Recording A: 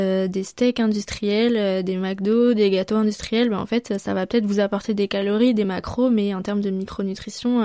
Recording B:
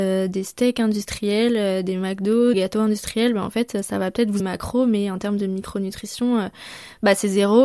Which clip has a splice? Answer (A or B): B